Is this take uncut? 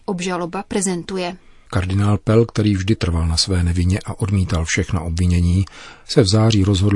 yes; 0 cuts

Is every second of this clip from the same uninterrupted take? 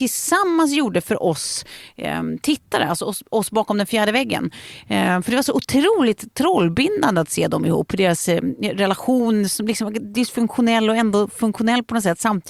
yes; 0 cuts

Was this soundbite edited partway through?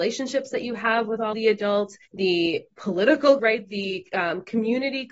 yes; 3 cuts; at 1.3 s, 2.0 s, 3.4 s

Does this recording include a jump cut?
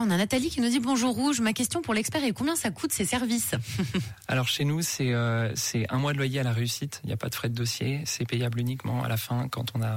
no; 0 cuts

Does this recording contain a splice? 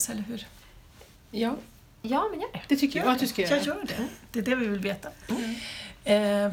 no; 0 cuts

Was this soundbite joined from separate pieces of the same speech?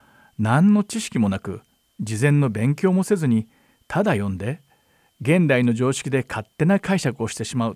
no; 0 cuts

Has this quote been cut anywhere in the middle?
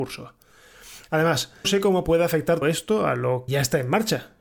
yes; 3 cuts; at 1.6 s, 2.6 s, 3.5 s

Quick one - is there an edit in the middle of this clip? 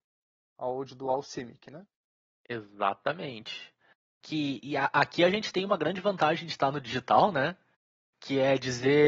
no; 0 cuts

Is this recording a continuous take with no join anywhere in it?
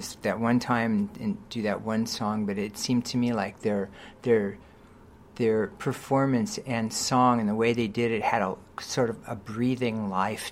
yes; 0 cuts

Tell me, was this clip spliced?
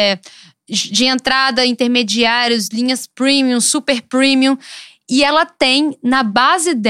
no; 0 cuts

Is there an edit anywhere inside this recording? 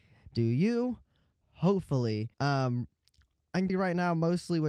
yes; 2 cuts; at 2.3 s, 3.7 s

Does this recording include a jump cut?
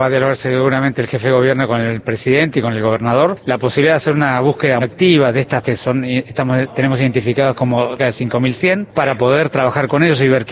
yes; 3 cuts; at 4.8 s, 5.6 s, 8.0 s

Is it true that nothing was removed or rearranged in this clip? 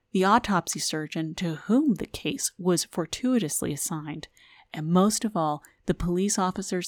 yes; 0 cuts

